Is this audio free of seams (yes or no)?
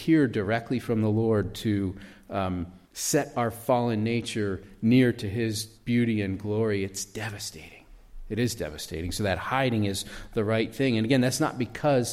no